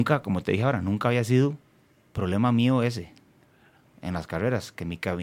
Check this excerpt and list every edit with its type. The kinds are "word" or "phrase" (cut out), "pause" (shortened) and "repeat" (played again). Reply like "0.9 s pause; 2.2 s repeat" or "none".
none